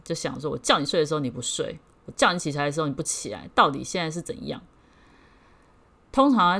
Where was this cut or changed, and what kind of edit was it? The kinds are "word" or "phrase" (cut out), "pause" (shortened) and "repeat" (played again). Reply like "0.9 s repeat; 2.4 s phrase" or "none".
none